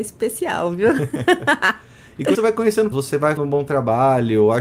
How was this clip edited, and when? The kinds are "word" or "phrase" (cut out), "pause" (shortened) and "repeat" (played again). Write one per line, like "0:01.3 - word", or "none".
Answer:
0:02.3 - word
0:02.9 - phrase
0:03.4 - word